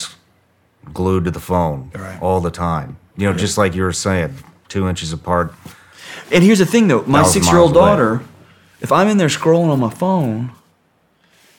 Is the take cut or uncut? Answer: uncut